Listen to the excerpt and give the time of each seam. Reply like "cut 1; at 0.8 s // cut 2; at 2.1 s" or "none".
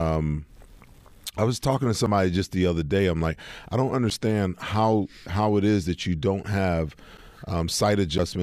none

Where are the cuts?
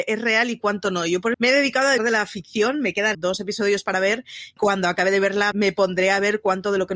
cut 1; at 1.3 s // cut 2; at 2.0 s // cut 3; at 3.1 s // cut 4; at 4.6 s // cut 5; at 5.5 s

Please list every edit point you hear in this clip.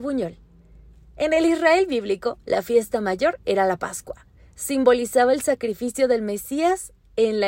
none

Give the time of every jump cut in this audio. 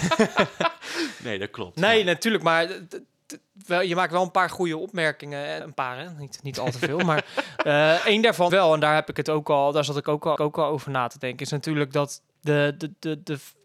cut 1; at 5.6 s // cut 2; at 8.5 s // cut 3; at 10.4 s // cut 4; at 12.3 s

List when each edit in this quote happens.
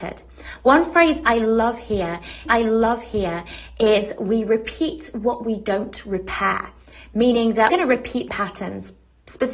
cut 1; at 2.5 s // cut 2; at 7.7 s // cut 3; at 8.3 s

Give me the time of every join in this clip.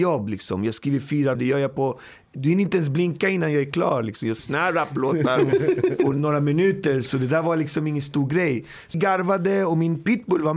cut 1; at 1.4 s // cut 2; at 4.4 s // cut 3; at 6.1 s // cut 4; at 8.9 s

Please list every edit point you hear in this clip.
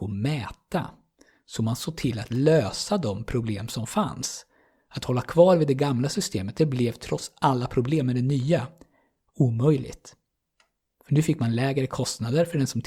none

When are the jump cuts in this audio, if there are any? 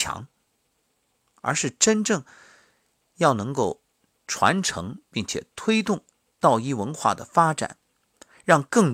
none

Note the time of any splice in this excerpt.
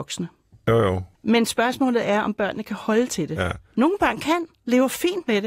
cut 1; at 1.1 s

